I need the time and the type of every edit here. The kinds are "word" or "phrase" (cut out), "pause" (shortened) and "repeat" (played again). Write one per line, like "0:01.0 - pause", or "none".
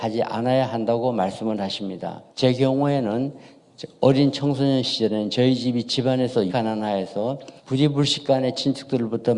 0:02.3 - pause
0:06.5 - word
0:07.6 - pause